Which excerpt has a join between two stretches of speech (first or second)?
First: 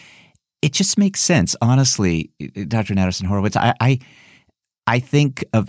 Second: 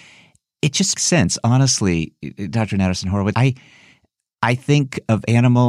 second